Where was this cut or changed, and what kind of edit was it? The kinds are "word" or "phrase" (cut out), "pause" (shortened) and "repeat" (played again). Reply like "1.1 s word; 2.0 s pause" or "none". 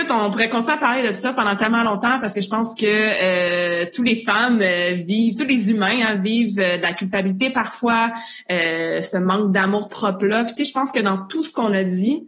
none